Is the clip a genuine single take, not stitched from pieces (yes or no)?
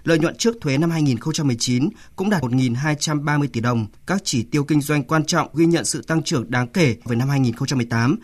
no